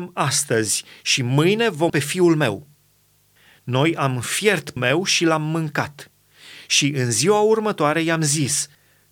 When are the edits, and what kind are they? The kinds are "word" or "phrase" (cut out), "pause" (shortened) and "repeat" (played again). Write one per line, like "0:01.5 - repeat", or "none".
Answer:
0:01.9 - word
0:04.8 - word